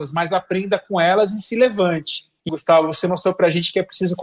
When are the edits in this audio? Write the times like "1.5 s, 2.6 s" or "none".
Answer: 2.5 s